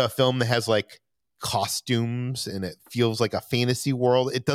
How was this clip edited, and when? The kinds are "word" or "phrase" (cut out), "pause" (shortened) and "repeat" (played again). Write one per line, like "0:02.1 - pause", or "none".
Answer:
0:01.1 - pause
0:02.8 - pause